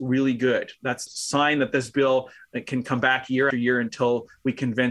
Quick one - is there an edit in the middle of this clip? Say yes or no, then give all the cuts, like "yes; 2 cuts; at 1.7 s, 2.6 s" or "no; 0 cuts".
yes; 2 cuts; at 1.1 s, 3.5 s